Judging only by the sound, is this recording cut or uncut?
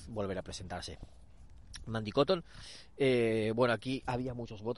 uncut